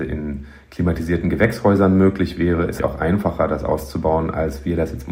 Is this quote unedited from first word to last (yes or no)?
no